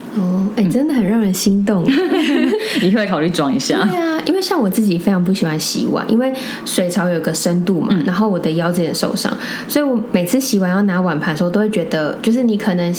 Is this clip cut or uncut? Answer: uncut